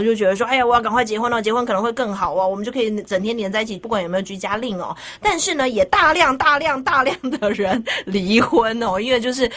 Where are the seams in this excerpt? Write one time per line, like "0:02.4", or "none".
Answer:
0:03.8